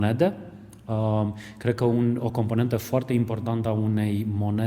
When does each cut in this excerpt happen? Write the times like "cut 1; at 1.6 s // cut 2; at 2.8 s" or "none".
none